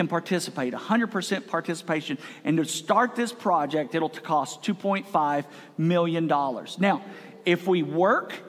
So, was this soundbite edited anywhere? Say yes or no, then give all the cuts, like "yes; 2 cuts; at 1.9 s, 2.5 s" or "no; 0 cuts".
no; 0 cuts